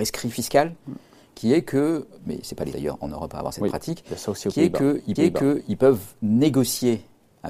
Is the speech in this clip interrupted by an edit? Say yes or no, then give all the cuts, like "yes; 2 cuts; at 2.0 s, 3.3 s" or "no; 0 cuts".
yes; 2 cuts; at 2.7 s, 5.2 s